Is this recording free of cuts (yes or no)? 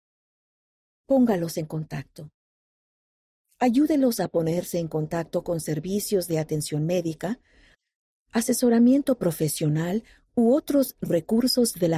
yes